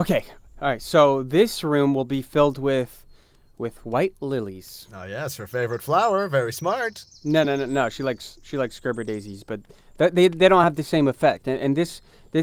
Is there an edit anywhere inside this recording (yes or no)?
no